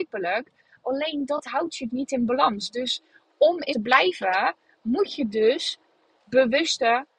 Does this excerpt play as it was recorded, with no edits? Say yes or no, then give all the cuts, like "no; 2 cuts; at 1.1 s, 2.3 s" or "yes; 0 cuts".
no; 2 cuts; at 1.9 s, 3.7 s